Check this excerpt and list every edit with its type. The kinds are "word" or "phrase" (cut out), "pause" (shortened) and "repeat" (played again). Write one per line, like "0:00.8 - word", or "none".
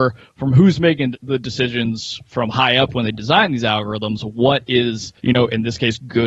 0:01.1 - word
0:05.2 - pause